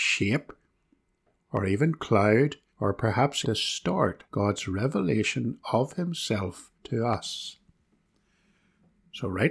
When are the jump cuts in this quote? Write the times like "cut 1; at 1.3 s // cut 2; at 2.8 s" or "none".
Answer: cut 1; at 2.7 s // cut 2; at 3.4 s // cut 3; at 4.3 s // cut 4; at 6.7 s